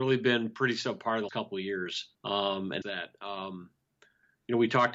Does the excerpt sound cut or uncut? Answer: cut